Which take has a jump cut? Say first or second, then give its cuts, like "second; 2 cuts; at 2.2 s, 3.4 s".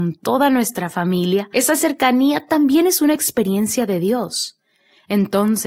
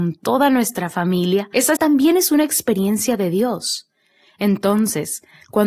second; 1 cut; at 1.8 s